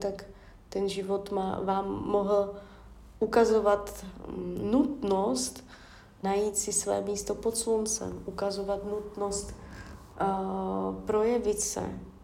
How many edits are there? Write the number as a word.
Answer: one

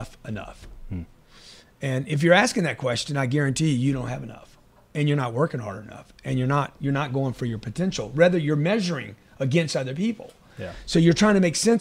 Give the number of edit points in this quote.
zero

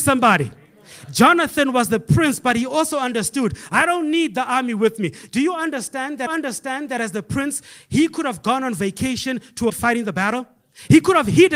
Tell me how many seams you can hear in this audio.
two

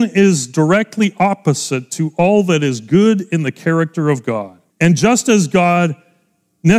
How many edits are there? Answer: one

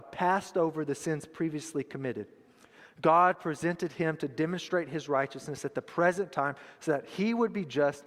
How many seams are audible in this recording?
zero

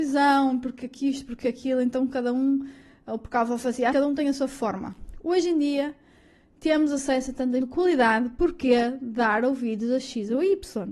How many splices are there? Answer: two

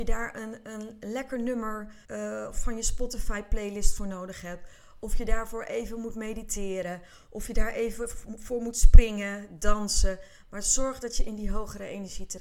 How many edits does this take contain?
one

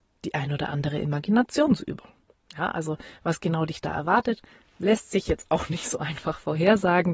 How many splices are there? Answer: zero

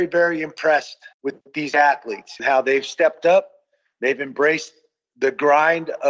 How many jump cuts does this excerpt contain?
two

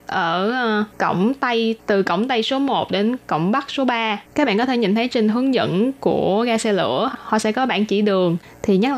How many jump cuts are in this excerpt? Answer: three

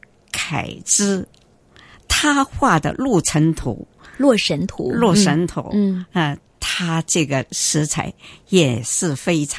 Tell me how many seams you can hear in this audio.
zero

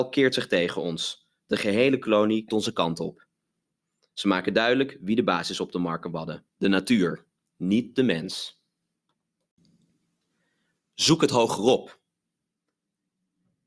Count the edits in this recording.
two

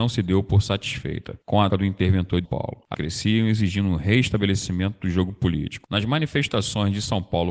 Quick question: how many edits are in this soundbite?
three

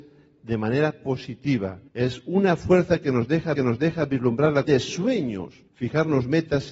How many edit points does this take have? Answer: four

